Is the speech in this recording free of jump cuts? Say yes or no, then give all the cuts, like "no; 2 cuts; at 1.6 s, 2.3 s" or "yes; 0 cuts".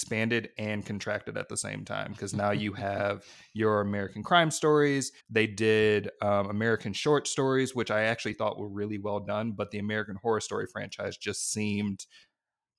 no; 1 cut; at 5.2 s